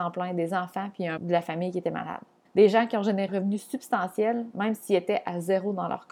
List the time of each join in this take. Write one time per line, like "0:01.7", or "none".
0:01.2
0:02.5
0:03.3